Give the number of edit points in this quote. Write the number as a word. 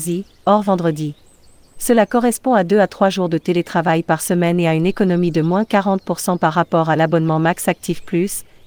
zero